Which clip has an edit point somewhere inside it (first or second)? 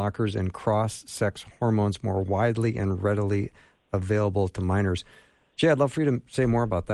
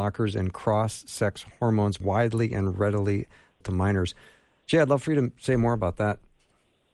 second